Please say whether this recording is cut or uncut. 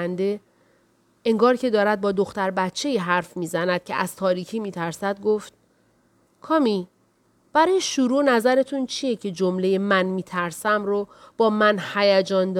uncut